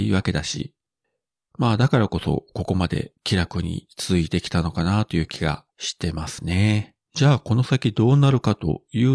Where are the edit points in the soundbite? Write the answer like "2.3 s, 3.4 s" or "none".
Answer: 3.2 s, 5.7 s, 7.0 s